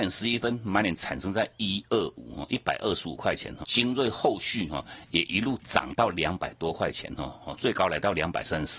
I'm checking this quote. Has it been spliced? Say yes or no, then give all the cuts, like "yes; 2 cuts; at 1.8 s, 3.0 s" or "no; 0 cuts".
yes; 1 cut; at 3.6 s